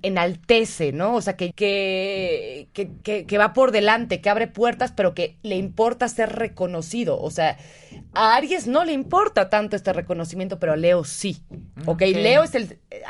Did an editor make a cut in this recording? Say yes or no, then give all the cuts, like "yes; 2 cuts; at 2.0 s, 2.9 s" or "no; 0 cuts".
yes; 2 cuts; at 1.5 s, 3.0 s